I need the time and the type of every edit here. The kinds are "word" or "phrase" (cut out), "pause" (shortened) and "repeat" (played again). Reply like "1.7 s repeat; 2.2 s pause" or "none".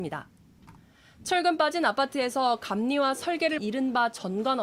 3.6 s word